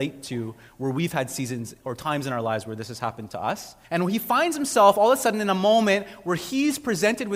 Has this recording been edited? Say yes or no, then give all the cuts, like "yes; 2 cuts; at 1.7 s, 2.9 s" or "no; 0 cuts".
yes; 1 cut; at 3.8 s